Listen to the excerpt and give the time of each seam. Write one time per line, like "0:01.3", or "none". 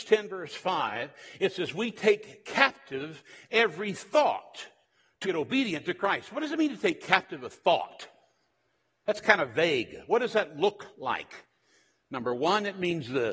0:05.2